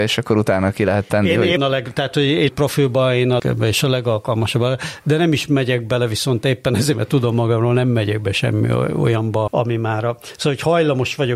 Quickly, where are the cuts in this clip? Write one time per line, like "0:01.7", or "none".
0:01.6
0:02.5
0:03.4
0:09.5